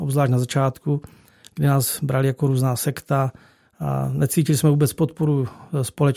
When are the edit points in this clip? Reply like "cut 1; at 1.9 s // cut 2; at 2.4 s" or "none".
none